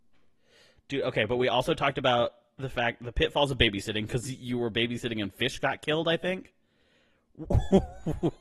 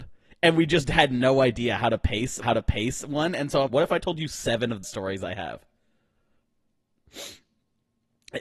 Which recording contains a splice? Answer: second; 3 cuts; at 2.4 s, 3.7 s, 4.8 s

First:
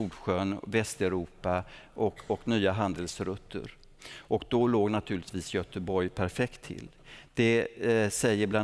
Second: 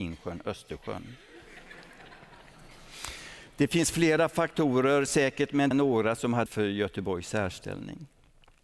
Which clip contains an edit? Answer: second; 2 cuts; at 5.7 s, 6.5 s

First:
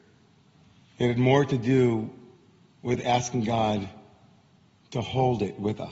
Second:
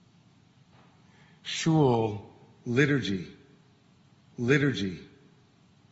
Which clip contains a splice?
second; 1 cut; at 4.3 s

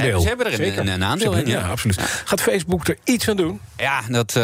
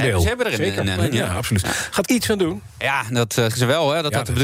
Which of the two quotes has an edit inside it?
second; 3 cuts; at 1.0 s, 2.0 s, 3.5 s

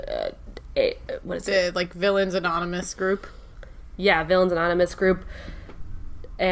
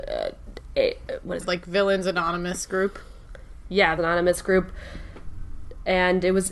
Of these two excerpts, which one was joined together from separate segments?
second; 2 cuts; at 1.4 s, 4.0 s

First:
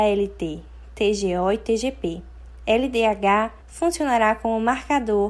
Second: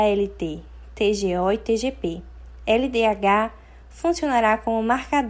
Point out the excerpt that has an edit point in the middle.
first; 1 cut; at 3.6 s

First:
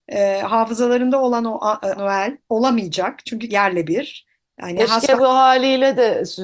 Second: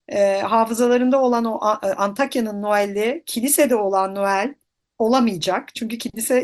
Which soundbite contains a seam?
first; 3 cuts; at 2.0 s, 2.4 s, 3.5 s

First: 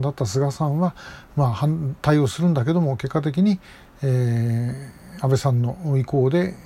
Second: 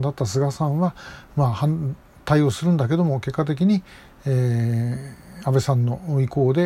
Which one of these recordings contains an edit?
first; 1 cut; at 2.0 s

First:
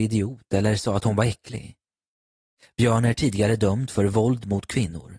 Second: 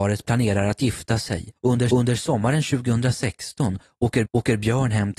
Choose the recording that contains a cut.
second; 3 cuts; at 1.6 s, 1.9 s, 4.3 s

